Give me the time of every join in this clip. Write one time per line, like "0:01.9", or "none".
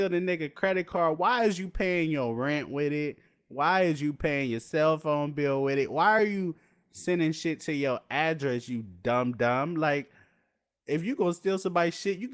none